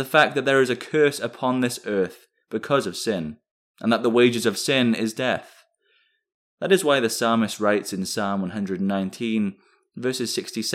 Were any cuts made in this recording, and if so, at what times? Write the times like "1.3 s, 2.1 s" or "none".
none

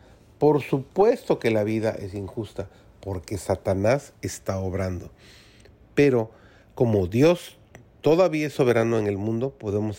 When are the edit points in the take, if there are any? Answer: none

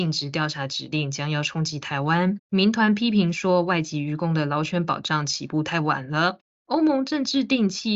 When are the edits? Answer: 2.5 s

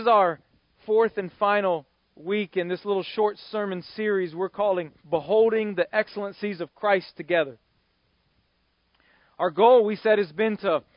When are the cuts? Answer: 5.0 s

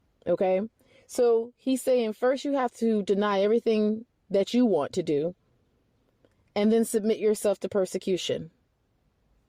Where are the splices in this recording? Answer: none

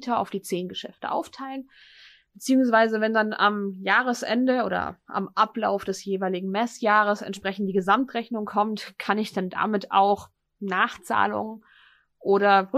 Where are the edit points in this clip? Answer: none

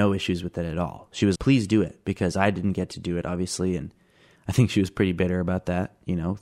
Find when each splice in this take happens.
1.4 s

